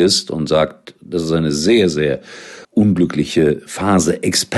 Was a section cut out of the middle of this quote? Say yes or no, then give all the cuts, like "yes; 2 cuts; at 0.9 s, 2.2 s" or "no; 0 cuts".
yes; 1 cut; at 2.6 s